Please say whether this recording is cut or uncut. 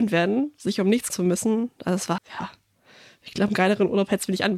cut